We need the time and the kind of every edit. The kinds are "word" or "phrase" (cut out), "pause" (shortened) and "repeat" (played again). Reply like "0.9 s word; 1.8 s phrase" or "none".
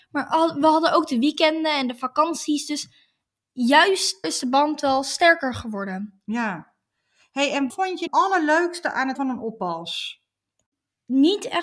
4.2 s word; 7.7 s word; 8.1 s word; 9.2 s word